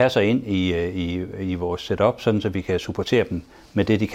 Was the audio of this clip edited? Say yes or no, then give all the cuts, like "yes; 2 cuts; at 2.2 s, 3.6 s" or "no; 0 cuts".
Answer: no; 0 cuts